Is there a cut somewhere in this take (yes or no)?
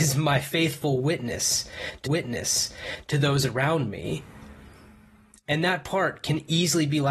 yes